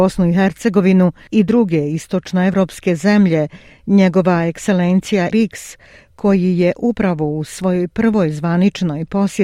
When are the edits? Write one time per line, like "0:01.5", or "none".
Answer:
0:05.3